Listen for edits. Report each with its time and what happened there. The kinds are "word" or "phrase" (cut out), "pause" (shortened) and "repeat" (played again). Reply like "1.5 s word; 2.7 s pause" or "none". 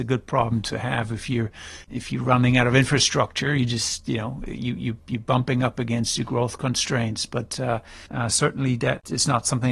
8.1 s pause